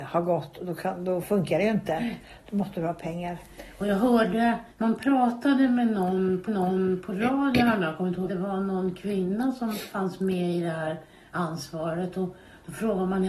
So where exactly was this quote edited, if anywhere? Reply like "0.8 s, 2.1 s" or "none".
1.2 s, 4.7 s, 6.5 s, 8.3 s